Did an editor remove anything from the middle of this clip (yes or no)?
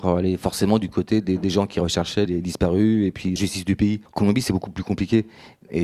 yes